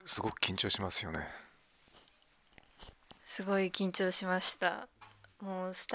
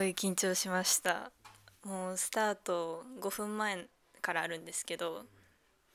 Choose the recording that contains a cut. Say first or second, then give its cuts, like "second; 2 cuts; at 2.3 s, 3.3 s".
first; 1 cut; at 3.2 s